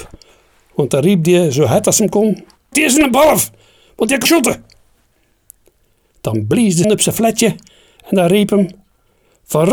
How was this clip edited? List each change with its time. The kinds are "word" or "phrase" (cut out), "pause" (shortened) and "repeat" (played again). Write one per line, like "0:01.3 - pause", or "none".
0:02.7 - word
0:04.3 - word
0:06.8 - word